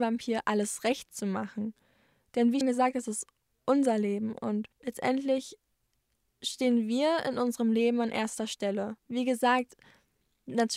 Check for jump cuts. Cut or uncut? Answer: cut